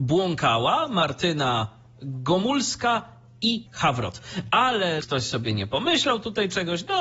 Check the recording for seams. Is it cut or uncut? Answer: cut